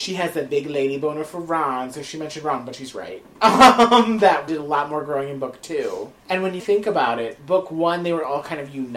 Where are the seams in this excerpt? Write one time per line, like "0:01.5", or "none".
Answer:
0:04.5
0:06.6

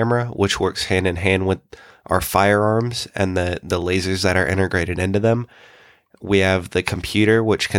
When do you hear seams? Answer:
none

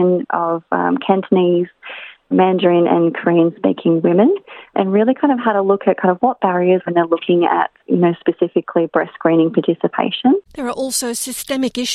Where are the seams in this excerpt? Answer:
0:02.3
0:04.7
0:06.9
0:07.8
0:10.5

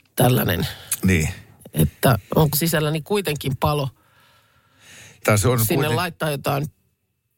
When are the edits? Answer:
0:02.5
0:05.2

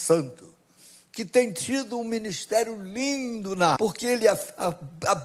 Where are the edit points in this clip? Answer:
0:03.8

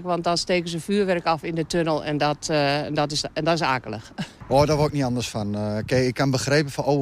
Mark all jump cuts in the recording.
0:04.4

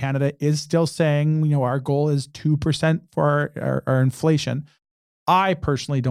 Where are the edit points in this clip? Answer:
none

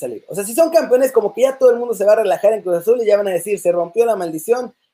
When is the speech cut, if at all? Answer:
none

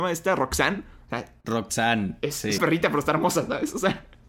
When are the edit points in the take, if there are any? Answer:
0:02.6

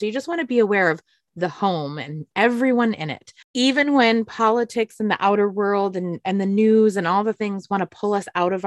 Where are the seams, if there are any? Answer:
0:03.4

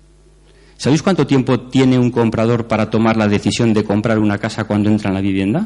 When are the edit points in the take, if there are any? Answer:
none

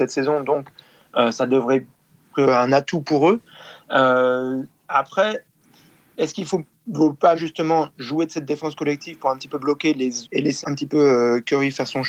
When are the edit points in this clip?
0:02.3
0:07.4
0:10.2
0:10.6

